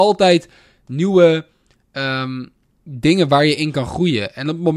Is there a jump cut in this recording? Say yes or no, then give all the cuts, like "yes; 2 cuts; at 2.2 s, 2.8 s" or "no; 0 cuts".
no; 0 cuts